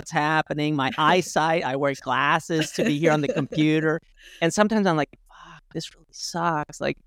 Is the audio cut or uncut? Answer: cut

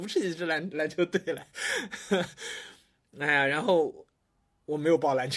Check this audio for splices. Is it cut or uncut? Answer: uncut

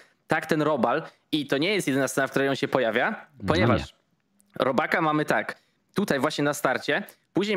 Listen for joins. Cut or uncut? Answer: uncut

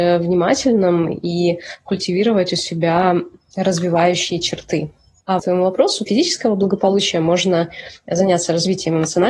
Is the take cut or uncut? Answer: cut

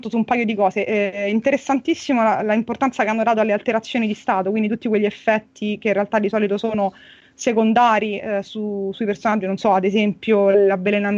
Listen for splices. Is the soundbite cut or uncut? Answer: uncut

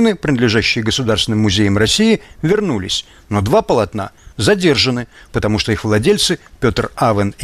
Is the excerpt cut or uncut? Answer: uncut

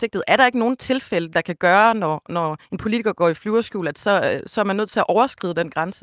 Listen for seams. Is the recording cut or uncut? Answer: cut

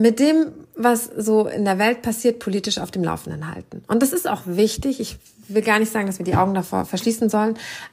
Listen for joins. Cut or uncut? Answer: uncut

